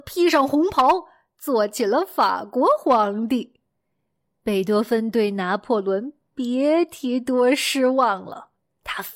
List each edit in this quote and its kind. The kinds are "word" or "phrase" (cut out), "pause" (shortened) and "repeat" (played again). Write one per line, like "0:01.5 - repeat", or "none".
none